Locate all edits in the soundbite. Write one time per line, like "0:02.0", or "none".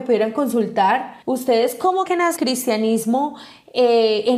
0:01.2
0:02.1
0:02.4